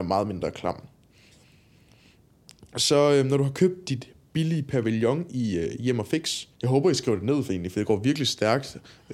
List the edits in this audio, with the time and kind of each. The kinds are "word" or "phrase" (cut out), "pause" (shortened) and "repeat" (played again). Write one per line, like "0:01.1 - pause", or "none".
0:06.5 - pause

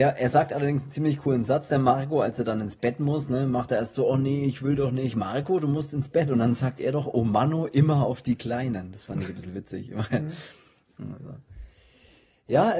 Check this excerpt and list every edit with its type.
none

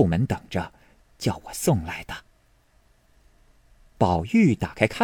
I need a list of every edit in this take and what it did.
none

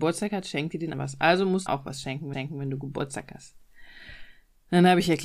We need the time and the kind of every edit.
0:00.9 - word
0:01.7 - phrase
0:02.3 - repeat

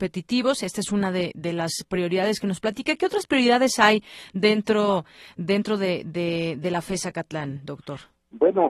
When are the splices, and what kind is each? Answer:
none

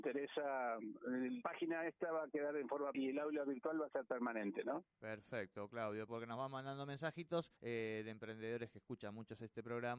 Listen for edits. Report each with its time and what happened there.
0:01.4 - word
0:02.9 - word
0:04.9 - pause
0:06.1 - word
0:07.6 - pause

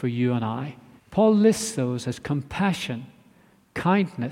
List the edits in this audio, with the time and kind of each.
0:01.0 - pause

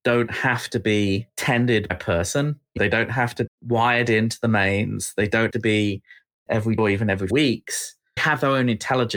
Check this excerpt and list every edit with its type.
0:01.9 - word
0:02.8 - word
0:03.5 - word
0:05.5 - word
0:06.5 - word
0:06.8 - word
0:07.3 - word
0:08.2 - word

